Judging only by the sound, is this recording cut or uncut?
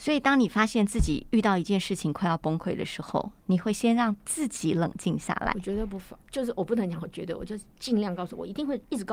cut